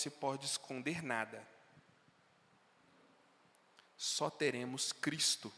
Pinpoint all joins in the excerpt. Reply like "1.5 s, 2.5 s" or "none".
none